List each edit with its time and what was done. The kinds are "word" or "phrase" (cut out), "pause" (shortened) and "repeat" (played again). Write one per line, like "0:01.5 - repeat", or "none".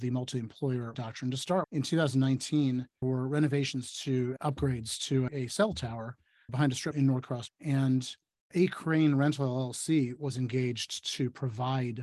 0:00.9 - word
0:01.6 - word
0:03.0 - word
0:04.4 - word
0:05.3 - word
0:06.5 - word
0:06.9 - word
0:07.5 - word
0:08.5 - word